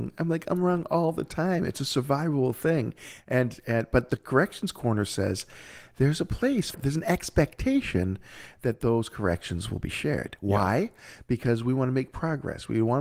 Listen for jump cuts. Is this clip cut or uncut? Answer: cut